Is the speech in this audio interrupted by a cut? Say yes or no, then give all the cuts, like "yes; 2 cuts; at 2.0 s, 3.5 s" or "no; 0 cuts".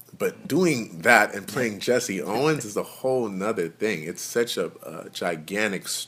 no; 0 cuts